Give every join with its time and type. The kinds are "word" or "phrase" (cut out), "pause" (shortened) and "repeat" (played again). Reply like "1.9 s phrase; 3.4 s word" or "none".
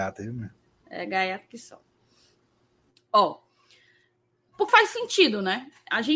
4.7 s word

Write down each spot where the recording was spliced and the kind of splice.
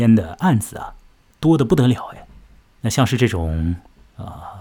2.6 s pause

